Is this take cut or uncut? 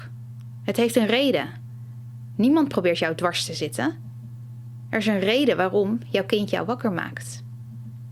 uncut